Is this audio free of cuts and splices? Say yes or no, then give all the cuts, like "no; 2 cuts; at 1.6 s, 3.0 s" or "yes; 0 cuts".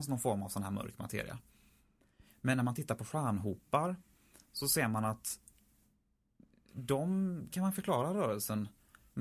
no; 1 cut; at 7.5 s